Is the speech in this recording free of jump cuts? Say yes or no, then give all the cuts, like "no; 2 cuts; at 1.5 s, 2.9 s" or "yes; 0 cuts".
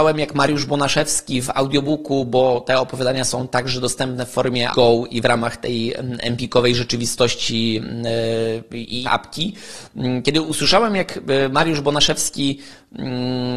no; 2 cuts; at 4.7 s, 9.1 s